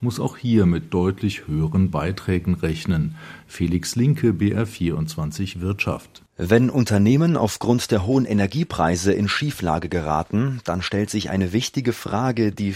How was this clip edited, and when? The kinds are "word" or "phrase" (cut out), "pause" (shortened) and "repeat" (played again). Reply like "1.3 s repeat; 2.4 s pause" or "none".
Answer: 6.3 s pause